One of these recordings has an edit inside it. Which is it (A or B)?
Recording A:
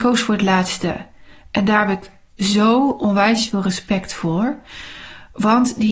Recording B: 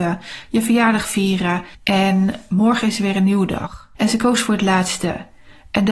B